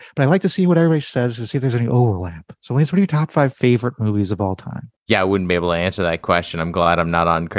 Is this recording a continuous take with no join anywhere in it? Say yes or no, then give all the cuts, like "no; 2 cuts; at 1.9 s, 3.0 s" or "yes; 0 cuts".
no; 2 cuts; at 2.6 s, 5.0 s